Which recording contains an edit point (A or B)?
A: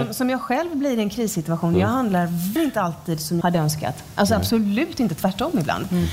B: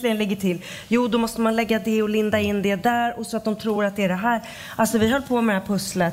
A